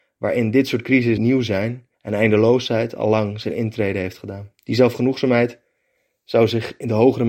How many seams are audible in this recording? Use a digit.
3